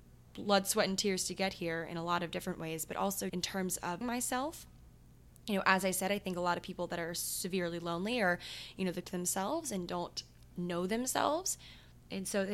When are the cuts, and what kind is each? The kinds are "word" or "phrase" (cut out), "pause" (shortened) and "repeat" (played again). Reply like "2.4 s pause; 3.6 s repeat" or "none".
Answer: 3.3 s word; 4.0 s word; 9.0 s phrase